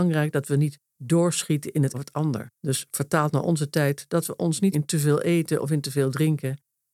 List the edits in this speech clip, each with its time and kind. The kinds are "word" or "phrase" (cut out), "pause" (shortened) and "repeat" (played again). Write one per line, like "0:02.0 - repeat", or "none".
0:01.9 - word
0:02.5 - pause
0:04.7 - word